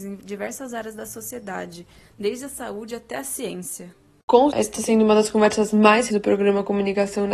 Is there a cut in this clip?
yes; 2 cuts; at 4.5 s, 6.1 s

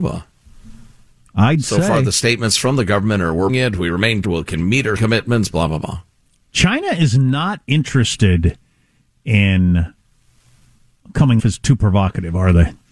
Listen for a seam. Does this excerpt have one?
yes; 4 cuts; at 3.5 s, 4.2 s, 5.0 s, 11.4 s

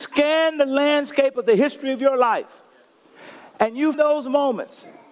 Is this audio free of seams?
no; 1 cut; at 3.9 s

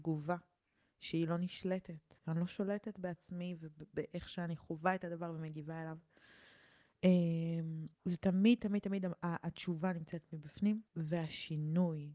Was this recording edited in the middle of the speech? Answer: yes; 3 cuts; at 2.2 s, 7.9 s, 10.9 s

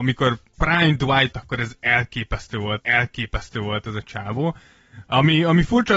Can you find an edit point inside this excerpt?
yes; 2 cuts; at 1.3 s, 2.8 s

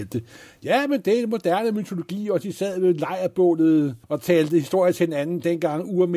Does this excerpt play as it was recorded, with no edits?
no; 1 cut; at 4.0 s

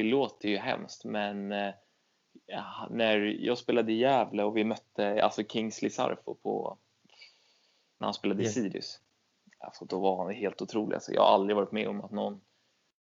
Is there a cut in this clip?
no; 0 cuts

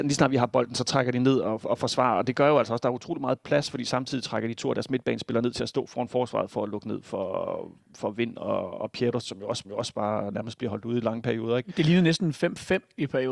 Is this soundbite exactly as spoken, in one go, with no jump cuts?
no; 1 cut; at 9.6 s

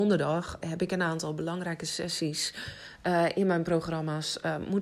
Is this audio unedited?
yes; 0 cuts

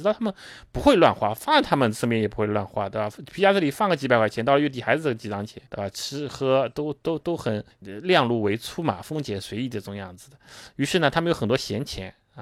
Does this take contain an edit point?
yes; 2 cuts; at 5.7 s, 7.7 s

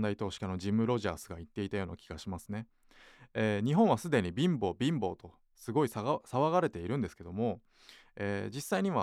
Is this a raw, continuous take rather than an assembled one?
yes; 0 cuts

